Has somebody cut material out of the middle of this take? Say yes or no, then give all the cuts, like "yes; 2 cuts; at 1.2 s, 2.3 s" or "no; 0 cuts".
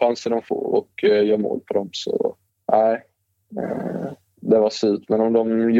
yes; 1 cut; at 2.5 s